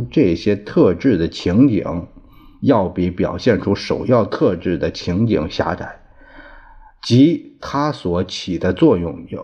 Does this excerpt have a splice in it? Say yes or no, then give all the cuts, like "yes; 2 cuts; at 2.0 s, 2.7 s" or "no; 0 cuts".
no; 0 cuts